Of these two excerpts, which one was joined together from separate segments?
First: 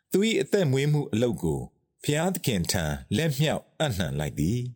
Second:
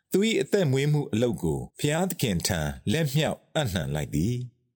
second; 1 cut; at 1.7 s

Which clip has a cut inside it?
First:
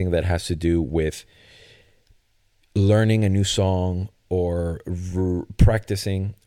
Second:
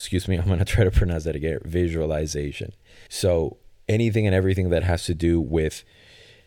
second; 1 cut; at 3.1 s

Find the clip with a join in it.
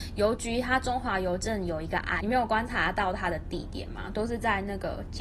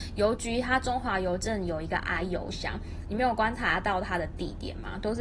first; 1 cut; at 2.2 s

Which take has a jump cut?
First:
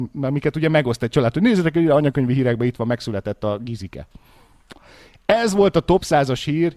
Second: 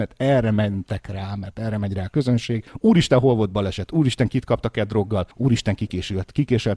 second; 2 cuts; at 2.7 s, 5.3 s

